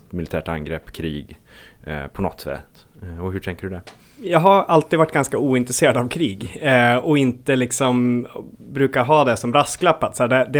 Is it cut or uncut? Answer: uncut